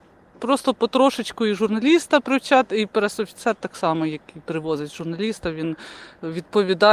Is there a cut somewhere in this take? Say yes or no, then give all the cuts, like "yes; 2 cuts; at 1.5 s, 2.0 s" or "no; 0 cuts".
no; 0 cuts